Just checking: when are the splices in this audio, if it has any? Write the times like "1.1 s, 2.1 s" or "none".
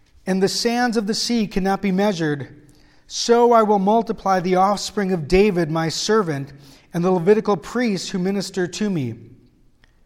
none